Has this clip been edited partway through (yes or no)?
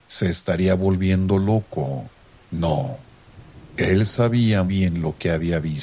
yes